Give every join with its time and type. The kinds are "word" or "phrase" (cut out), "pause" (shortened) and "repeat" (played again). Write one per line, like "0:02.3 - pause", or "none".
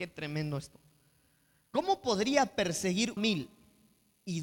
0:03.2 - phrase